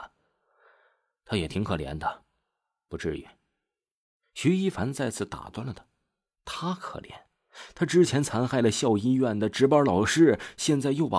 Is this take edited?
no; 0 cuts

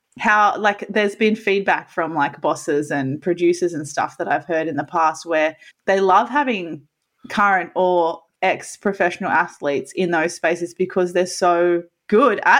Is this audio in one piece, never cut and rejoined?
no; 1 cut; at 5.7 s

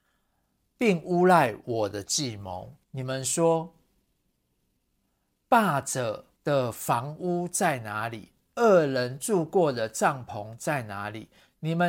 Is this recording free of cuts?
no; 2 cuts; at 2.8 s, 6.4 s

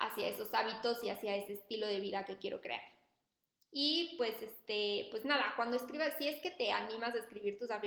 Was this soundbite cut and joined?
no; 0 cuts

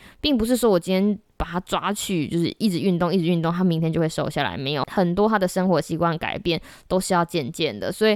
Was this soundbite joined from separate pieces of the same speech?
no; 0 cuts

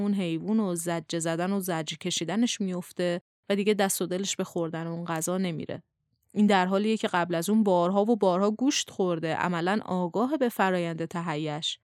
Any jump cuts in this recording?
no; 0 cuts

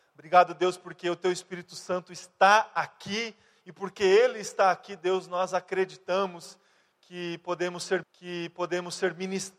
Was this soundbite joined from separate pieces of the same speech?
yes; 1 cut; at 8.0 s

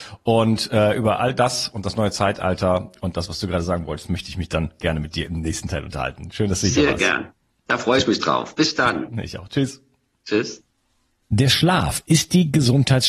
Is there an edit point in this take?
no; 0 cuts

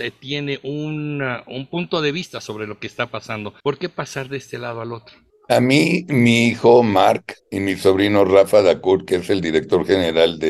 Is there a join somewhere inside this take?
yes; 3 cuts; at 3.6 s, 5.3 s, 7.4 s

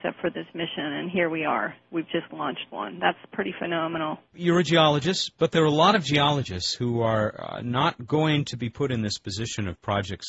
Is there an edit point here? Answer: yes; 1 cut; at 4.3 s

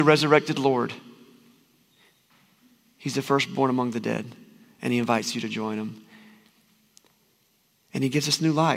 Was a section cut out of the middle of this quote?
no; 0 cuts

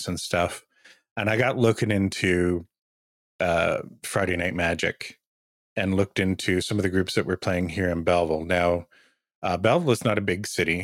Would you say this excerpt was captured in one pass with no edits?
yes; 0 cuts

